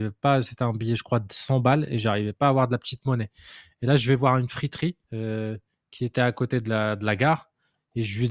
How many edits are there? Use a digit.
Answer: 1